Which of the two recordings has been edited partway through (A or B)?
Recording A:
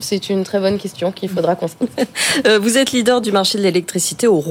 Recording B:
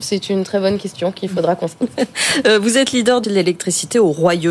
B